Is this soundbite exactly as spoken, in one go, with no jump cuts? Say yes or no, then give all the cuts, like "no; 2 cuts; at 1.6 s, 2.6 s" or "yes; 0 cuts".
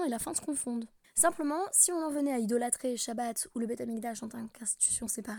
no; 1 cut; at 1.0 s